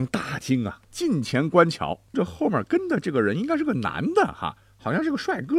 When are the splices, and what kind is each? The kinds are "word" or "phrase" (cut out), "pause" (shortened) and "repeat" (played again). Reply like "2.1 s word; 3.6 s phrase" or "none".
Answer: 2.1 s word